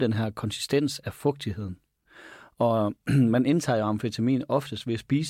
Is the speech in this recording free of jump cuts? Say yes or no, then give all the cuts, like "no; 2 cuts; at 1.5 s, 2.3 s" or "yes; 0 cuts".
yes; 0 cuts